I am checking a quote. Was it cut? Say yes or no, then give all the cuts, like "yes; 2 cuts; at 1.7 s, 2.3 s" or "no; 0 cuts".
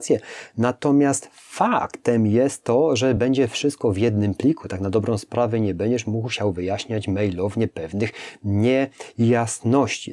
no; 0 cuts